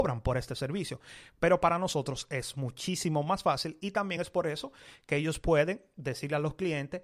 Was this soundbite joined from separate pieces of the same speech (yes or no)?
no